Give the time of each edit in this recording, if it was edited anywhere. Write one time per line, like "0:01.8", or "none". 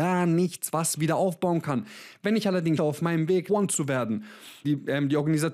0:01.0
0:02.8
0:03.5
0:04.6